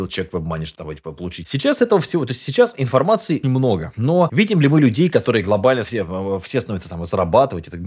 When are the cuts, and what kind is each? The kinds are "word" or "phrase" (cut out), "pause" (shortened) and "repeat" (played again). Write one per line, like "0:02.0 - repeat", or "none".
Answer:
0:03.4 - word
0:05.8 - word